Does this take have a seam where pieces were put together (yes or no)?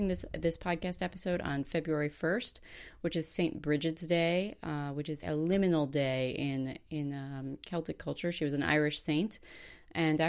yes